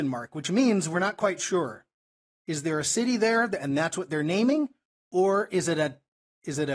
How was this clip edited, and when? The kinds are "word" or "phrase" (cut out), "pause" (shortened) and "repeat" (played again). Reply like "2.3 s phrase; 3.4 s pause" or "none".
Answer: none